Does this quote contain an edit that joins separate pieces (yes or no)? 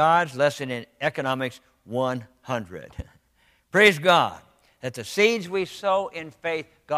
no